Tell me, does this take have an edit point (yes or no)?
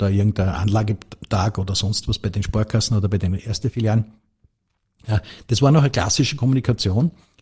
no